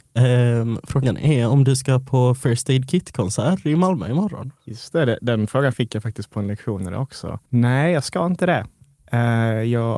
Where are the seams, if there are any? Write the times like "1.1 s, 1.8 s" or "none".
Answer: 4.6 s, 7.5 s